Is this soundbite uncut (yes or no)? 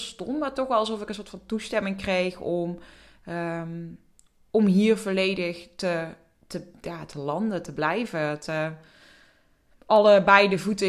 yes